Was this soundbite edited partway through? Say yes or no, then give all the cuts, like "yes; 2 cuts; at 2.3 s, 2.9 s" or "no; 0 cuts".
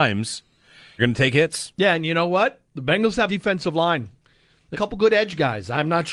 yes; 3 cuts; at 1.0 s, 3.3 s, 4.7 s